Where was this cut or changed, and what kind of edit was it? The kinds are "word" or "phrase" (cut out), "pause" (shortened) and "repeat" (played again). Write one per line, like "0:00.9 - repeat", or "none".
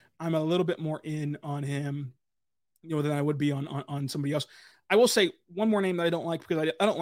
none